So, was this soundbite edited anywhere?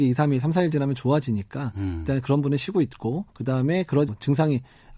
yes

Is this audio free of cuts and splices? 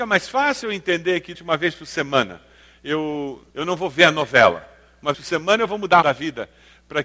no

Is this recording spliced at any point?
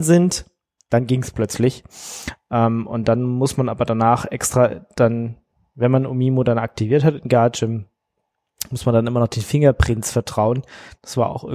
no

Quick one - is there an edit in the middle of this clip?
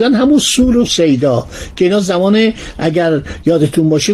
no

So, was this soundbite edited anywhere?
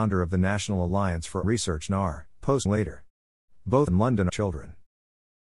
yes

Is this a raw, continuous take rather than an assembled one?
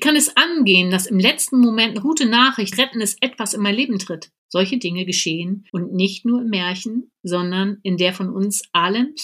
no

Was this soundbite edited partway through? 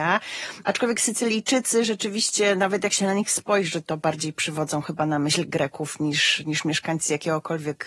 no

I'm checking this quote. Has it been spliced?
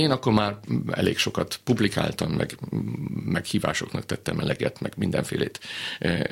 no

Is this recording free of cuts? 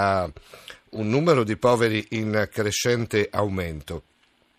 yes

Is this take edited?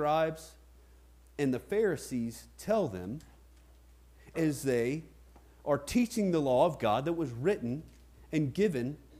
yes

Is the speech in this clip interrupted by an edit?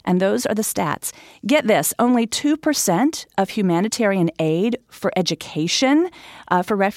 no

